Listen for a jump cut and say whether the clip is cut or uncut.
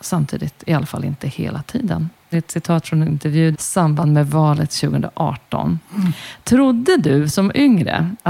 cut